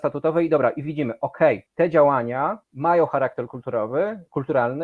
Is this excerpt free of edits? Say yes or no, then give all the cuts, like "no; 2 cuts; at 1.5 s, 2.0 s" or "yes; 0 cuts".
no; 2 cuts; at 1.7 s, 2.6 s